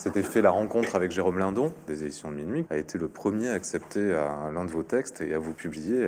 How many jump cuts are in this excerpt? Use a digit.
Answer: 2